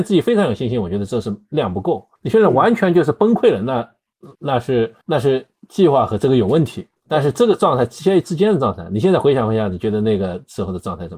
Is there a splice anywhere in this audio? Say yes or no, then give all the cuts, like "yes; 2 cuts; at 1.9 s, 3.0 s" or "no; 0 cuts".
yes; 4 cuts; at 2.1 s, 4.3 s, 5.0 s, 7.0 s